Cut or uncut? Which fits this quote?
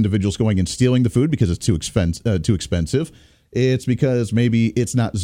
uncut